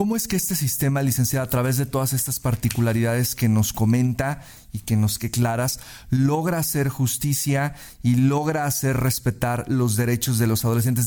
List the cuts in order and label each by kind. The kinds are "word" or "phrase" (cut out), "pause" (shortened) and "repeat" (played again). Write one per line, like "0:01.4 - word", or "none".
0:05.2 - phrase